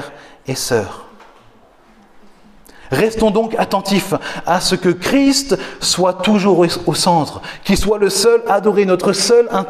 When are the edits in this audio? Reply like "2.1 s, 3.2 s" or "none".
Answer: none

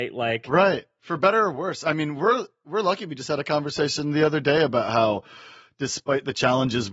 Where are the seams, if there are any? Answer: none

